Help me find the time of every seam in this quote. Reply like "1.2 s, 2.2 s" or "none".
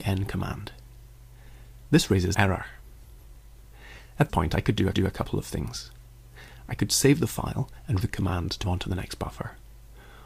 2.3 s, 4.3 s, 4.9 s, 8.0 s, 8.6 s

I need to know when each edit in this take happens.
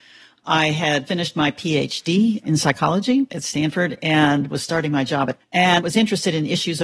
1.1 s, 5.4 s

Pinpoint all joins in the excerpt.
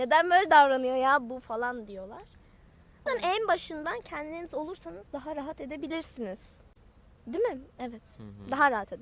3.1 s

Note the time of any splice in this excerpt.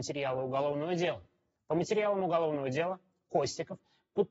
none

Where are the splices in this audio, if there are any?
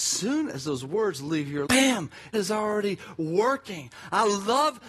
1.7 s, 2.3 s

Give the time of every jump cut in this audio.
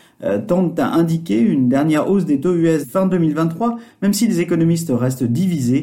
2.8 s

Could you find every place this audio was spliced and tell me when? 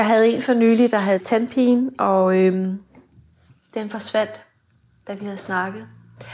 none

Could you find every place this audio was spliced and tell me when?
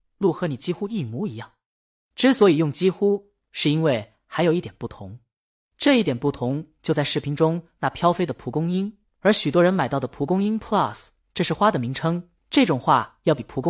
none

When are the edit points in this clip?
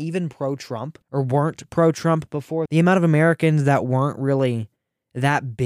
1.0 s, 2.7 s

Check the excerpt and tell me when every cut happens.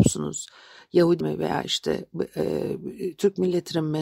1.2 s

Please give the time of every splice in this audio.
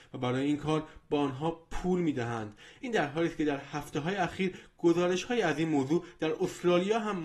none

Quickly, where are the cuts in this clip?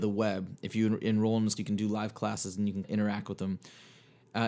1.6 s, 2.8 s

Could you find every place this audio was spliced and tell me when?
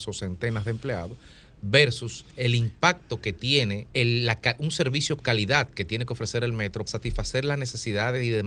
2.3 s, 3.9 s, 5.2 s, 6.9 s

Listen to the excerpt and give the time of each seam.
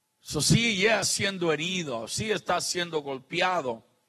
1.0 s

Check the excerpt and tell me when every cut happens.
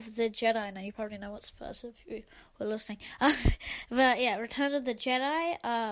none

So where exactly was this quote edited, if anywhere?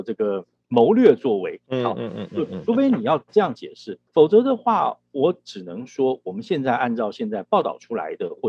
4.1 s

